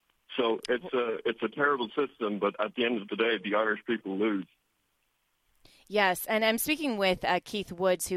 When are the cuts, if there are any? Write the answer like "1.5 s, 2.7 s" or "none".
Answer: none